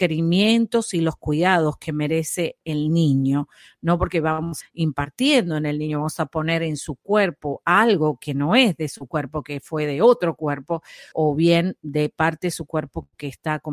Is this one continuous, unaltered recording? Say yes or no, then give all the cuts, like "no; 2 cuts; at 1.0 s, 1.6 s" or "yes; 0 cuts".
no; 2 cuts; at 4.6 s, 11.1 s